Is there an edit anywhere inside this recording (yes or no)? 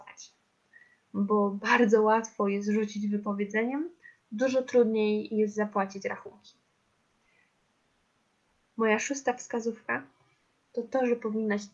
no